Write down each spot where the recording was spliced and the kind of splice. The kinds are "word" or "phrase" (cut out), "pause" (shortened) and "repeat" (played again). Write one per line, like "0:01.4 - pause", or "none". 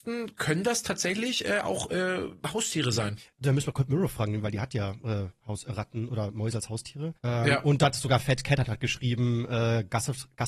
0:07.2 - pause